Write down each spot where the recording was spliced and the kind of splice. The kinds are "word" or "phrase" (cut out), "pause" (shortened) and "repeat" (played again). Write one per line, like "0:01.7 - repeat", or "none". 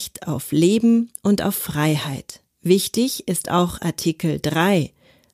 0:02.5 - pause